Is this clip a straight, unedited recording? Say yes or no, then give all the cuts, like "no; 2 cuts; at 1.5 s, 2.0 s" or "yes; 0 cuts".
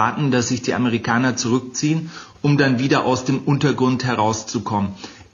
yes; 0 cuts